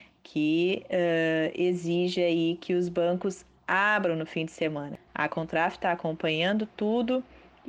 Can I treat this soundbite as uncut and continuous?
no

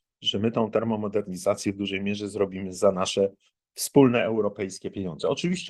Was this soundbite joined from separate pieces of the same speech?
no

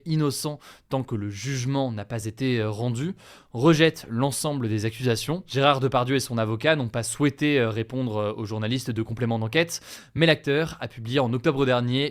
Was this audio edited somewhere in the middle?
no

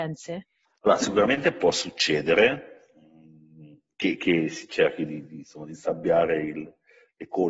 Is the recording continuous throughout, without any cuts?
yes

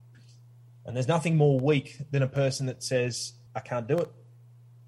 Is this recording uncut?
no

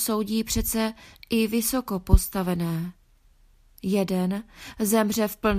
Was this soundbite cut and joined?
no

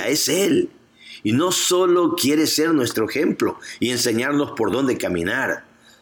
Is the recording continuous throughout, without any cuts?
yes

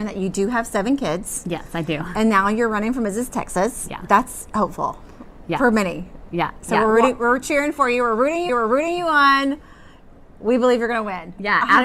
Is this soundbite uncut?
no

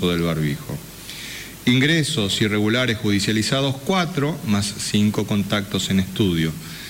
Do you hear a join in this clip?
no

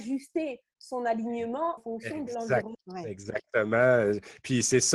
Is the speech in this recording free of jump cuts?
no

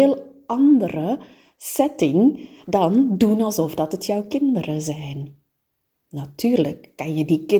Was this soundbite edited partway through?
no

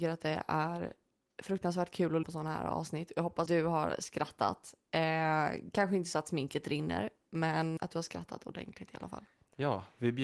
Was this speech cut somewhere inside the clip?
yes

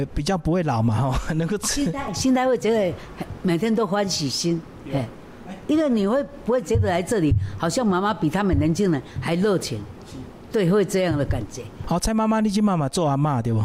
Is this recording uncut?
yes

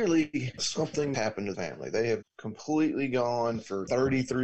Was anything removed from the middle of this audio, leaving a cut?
yes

